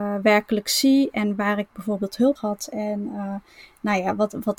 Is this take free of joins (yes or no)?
no